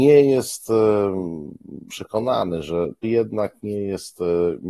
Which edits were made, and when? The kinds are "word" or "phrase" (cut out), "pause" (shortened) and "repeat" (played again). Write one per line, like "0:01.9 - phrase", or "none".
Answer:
0:01.9 - word
0:03.0 - word